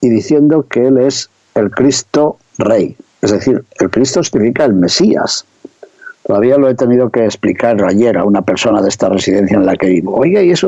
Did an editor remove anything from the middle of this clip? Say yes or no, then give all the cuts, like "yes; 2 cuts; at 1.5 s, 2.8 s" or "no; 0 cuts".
no; 0 cuts